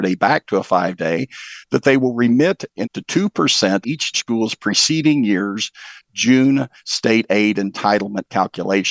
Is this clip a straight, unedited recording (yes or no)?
no